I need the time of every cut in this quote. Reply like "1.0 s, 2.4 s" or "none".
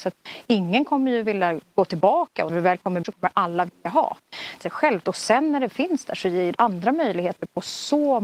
2.5 s, 3.0 s, 4.6 s, 5.7 s, 6.6 s